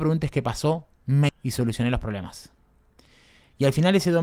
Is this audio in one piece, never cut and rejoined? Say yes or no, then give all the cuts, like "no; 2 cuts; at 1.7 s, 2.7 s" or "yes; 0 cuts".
no; 1 cut; at 1.3 s